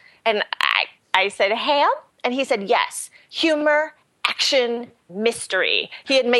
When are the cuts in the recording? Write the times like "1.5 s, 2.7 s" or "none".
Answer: 5.1 s

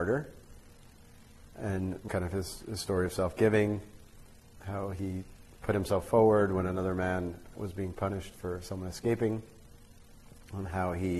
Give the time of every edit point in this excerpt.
2.1 s, 4.6 s, 7.5 s

